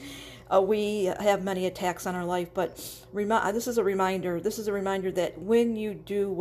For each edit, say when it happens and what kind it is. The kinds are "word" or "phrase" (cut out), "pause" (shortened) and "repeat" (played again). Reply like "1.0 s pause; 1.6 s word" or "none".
none